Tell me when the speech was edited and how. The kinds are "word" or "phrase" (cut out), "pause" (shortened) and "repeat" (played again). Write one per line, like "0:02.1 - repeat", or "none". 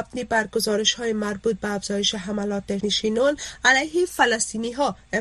0:02.8 - word